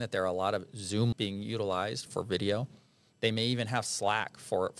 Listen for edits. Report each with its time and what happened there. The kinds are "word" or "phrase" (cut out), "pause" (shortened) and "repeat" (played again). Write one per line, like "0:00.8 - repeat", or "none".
0:01.1 - word
0:02.1 - word